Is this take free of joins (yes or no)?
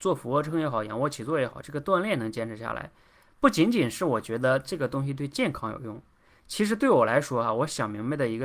yes